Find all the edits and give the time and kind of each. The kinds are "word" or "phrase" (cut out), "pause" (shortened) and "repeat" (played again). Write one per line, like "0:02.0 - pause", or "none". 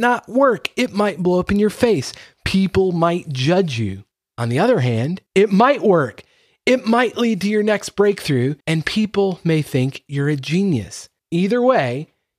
0:04.1 - pause
0:05.3 - pause
0:08.6 - pause
0:11.2 - pause

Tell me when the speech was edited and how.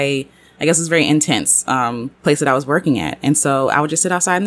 0:02.1 - pause

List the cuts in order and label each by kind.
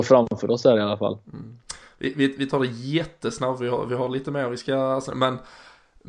none

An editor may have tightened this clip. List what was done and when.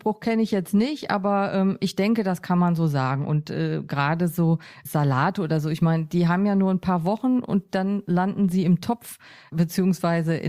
none

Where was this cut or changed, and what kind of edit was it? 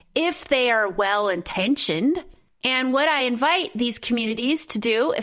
none

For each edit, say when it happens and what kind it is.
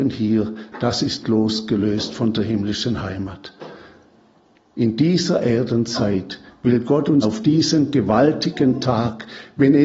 0:01.2 - word
0:07.2 - word

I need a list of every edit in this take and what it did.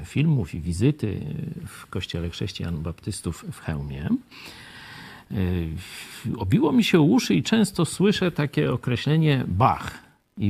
none

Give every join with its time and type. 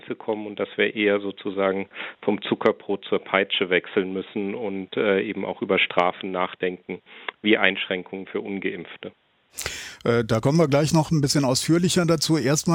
none

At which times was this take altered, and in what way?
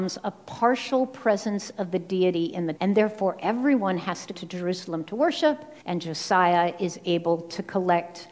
0:02.8 - word
0:04.3 - word
0:05.8 - pause

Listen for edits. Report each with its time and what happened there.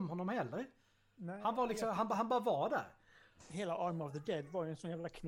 none

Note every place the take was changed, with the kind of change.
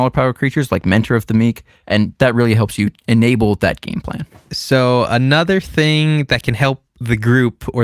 0:03.0 - pause

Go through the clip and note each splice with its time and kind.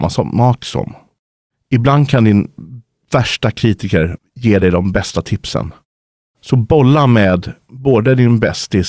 none

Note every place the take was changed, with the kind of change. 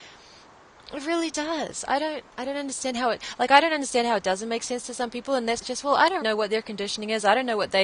0:02.3 - pause
0:05.6 - phrase
0:06.2 - word

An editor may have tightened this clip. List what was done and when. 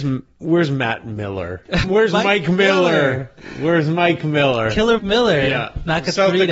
0:01.8 - word
0:05.0 - word

